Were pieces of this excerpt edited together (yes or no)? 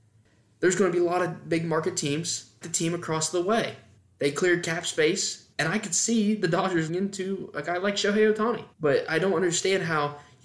yes